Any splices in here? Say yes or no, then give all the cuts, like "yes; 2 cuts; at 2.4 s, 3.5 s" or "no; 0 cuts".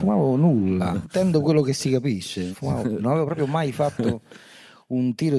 yes; 3 cuts; at 1.0 s, 2.5 s, 3.0 s